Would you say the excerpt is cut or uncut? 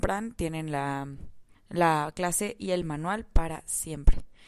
cut